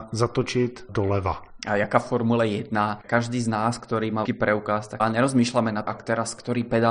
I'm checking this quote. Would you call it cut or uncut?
cut